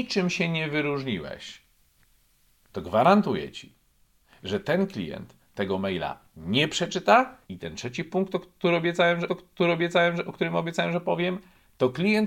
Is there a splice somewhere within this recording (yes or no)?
yes